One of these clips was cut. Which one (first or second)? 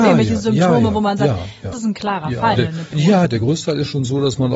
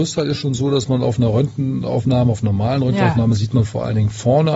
first